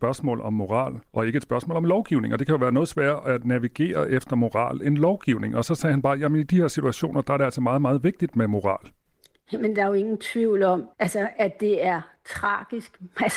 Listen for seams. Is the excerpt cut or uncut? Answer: cut